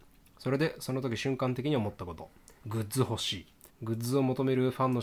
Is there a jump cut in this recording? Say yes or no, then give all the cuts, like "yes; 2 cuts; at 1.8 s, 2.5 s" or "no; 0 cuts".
yes; 2 cuts; at 2.6 s, 3.7 s